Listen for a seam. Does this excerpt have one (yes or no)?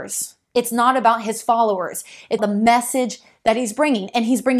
yes